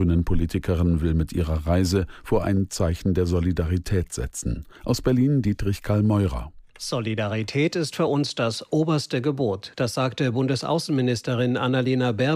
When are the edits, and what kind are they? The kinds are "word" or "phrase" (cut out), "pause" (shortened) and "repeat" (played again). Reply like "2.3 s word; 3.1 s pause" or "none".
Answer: 2.4 s word; 4.7 s pause